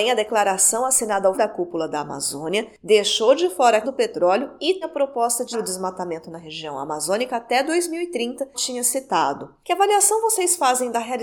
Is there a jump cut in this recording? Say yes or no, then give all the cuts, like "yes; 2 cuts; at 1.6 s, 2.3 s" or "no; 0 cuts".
yes; 5 cuts; at 1.3 s, 3.8 s, 4.8 s, 5.5 s, 8.5 s